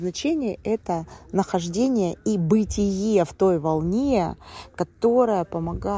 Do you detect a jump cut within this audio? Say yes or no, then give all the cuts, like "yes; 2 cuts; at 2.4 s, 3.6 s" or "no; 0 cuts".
no; 0 cuts